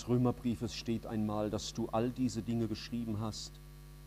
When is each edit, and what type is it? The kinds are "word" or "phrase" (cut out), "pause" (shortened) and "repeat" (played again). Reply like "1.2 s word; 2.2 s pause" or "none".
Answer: none